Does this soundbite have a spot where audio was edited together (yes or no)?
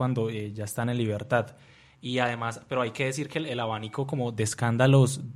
no